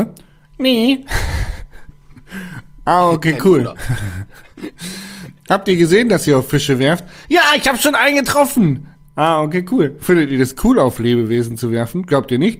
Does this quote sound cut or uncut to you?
uncut